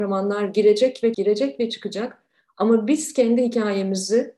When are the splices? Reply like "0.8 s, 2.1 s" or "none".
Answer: 1.1 s